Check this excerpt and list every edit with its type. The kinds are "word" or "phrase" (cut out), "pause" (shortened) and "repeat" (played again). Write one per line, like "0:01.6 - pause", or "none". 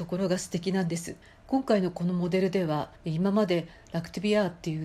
0:01.2 - pause
0:03.0 - pause